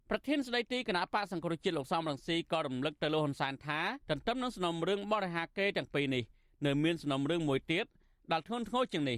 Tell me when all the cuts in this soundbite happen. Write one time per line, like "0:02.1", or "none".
0:04.0